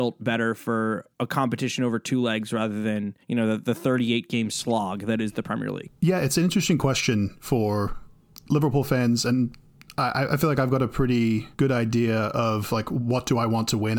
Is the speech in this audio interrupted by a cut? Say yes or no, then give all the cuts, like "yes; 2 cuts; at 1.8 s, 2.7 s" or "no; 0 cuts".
yes; 3 cuts; at 1.1 s, 3.2 s, 11.5 s